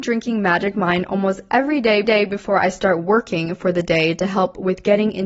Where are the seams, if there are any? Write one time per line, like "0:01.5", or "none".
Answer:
0:02.0